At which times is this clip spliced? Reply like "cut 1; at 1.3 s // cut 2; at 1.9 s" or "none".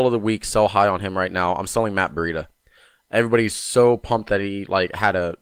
none